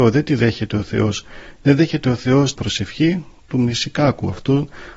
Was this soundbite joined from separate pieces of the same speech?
yes; 2 cuts; at 2.5 s, 3.4 s

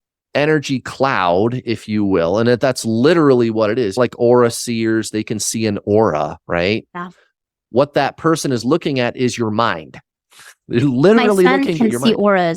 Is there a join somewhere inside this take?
no; 0 cuts

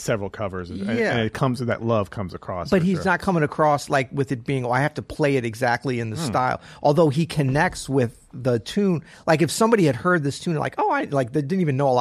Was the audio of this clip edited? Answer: no; 0 cuts

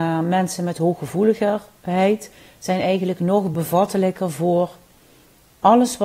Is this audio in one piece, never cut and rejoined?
yes; 0 cuts

